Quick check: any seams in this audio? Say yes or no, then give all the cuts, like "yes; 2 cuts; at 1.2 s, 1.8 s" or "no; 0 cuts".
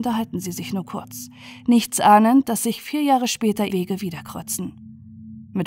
yes; 1 cut; at 3.7 s